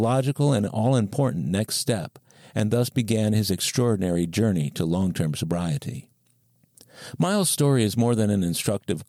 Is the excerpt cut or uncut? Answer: uncut